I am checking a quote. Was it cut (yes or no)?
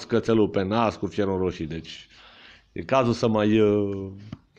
no